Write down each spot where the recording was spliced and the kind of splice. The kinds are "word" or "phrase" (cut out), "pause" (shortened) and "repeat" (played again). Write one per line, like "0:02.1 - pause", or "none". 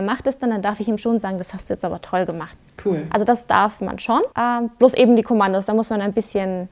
0:04.3 - pause